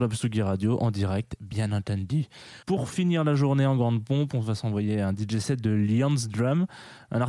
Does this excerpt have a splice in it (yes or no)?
yes